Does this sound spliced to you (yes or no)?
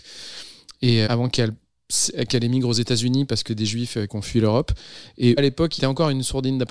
yes